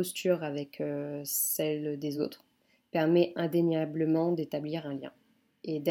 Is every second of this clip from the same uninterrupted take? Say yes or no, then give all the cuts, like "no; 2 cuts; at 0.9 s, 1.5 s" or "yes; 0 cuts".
yes; 0 cuts